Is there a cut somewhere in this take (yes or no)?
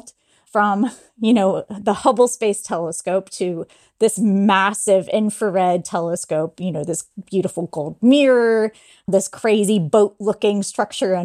no